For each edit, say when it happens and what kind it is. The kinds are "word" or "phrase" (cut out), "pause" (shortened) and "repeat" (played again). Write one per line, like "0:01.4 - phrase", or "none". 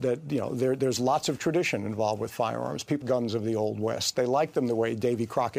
0:03.0 - word